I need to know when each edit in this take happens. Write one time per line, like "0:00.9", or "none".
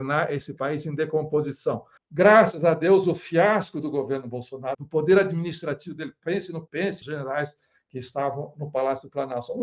0:02.0
0:04.7
0:06.7
0:07.0
0:08.5